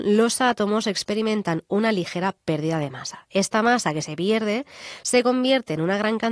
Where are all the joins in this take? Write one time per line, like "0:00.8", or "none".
none